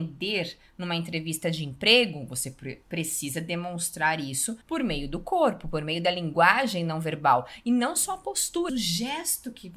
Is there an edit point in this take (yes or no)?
yes